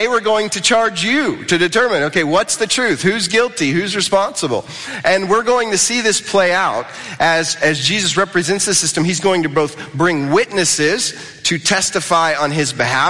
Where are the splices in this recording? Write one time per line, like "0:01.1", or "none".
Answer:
none